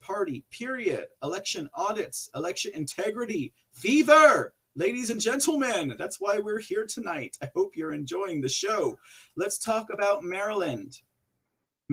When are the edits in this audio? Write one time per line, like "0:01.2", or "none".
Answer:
none